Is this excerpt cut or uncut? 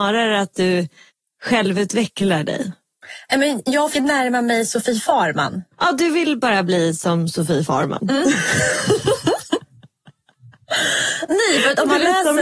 cut